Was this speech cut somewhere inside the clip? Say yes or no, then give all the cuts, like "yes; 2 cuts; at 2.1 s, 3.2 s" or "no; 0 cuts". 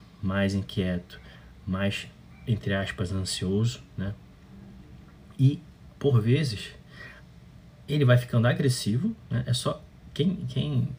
no; 0 cuts